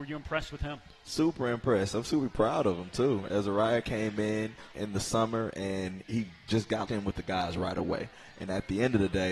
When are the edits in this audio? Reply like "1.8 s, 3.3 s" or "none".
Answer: 4.7 s, 6.0 s, 6.9 s